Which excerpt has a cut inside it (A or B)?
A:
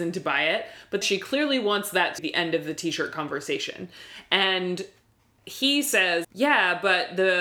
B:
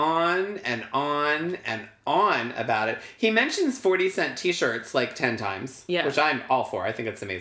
A